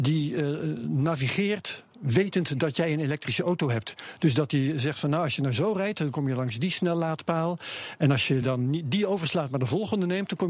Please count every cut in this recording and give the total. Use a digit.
0